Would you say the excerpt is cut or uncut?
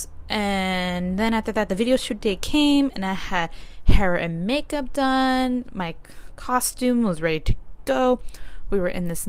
uncut